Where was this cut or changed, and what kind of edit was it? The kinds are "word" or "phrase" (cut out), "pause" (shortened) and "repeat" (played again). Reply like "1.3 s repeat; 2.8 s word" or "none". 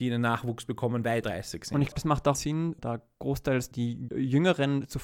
1.2 s word; 1.9 s word; 2.3 s word; 3.7 s word; 4.1 s word